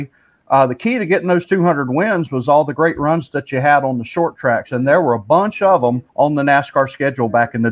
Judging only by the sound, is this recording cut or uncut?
cut